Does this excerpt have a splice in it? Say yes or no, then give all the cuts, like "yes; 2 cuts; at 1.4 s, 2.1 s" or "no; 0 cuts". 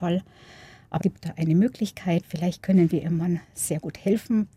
yes; 2 cuts; at 1.0 s, 2.2 s